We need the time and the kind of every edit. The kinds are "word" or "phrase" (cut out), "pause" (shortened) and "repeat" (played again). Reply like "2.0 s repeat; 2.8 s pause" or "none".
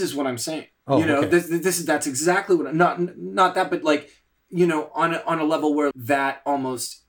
5.9 s word